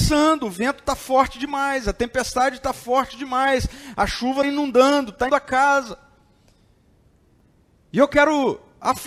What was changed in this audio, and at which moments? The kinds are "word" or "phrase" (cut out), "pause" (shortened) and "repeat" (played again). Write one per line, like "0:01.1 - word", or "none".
0:04.4 - word
0:05.3 - word